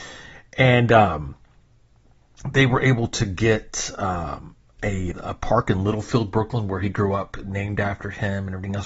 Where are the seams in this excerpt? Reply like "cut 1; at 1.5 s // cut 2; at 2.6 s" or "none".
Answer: cut 1; at 5.1 s